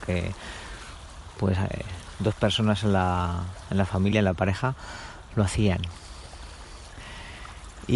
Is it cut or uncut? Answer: uncut